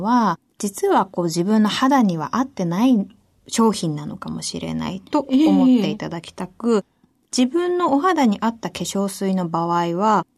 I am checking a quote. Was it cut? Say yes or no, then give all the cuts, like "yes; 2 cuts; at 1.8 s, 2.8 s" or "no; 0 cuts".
no; 0 cuts